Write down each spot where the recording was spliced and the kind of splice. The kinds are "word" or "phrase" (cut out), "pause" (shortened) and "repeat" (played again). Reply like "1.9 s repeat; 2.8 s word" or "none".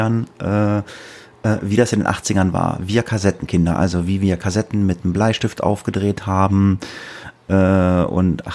none